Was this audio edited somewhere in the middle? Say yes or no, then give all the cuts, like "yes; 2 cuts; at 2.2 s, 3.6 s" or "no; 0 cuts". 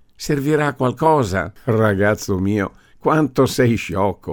no; 0 cuts